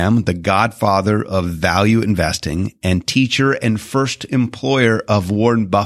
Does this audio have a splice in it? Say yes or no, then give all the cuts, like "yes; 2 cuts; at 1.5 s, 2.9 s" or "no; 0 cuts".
no; 0 cuts